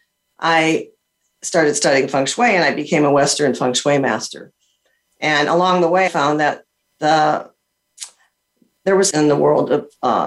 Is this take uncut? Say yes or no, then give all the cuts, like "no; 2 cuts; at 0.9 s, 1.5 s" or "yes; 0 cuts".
no; 2 cuts; at 6.1 s, 9.1 s